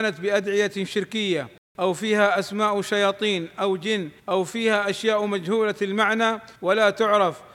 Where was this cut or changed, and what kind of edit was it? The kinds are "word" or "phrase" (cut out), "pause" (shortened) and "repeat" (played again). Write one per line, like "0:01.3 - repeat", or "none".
0:04.2 - pause
0:06.6 - pause